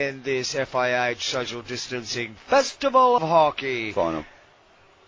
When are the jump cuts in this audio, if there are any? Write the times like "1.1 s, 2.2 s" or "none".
3.2 s